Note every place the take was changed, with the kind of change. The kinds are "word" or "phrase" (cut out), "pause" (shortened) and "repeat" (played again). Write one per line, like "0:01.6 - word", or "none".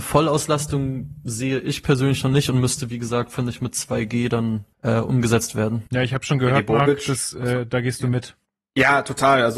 0:04.7 - pause
0:05.9 - pause
0:08.4 - pause